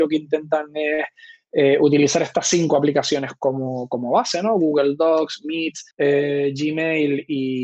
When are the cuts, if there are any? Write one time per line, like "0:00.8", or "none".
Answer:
0:05.9

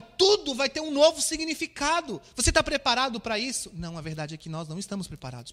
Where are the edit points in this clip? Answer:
none

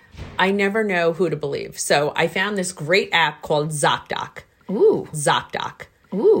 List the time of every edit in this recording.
0:05.1

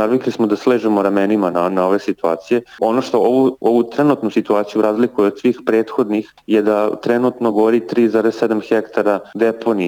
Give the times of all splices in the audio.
none

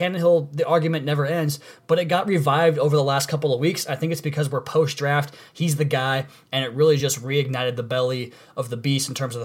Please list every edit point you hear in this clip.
none

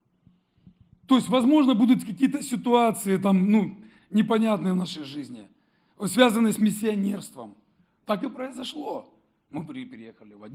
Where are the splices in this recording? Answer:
none

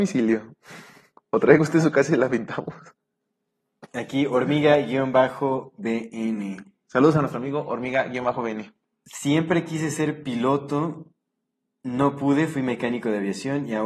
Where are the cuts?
none

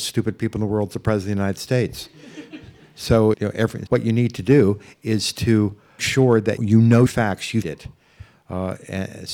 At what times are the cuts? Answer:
0:03.3
0:03.9
0:06.0
0:06.6
0:07.1
0:07.6

